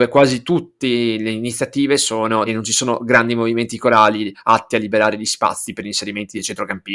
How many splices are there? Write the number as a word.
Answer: one